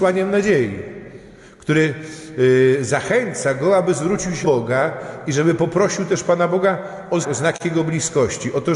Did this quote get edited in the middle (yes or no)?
yes